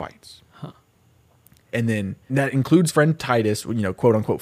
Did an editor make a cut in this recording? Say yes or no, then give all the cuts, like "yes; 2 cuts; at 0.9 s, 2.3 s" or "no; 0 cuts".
yes; 2 cuts; at 2.3 s, 2.9 s